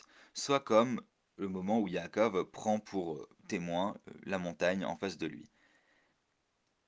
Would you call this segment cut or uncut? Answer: uncut